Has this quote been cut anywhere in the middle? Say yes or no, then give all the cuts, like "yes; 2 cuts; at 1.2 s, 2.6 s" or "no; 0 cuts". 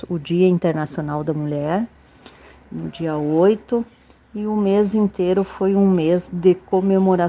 no; 0 cuts